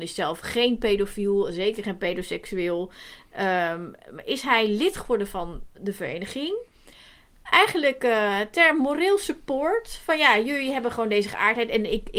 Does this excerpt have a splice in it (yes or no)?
no